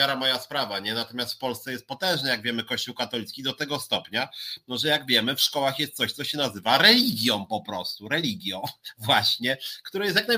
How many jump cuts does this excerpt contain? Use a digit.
0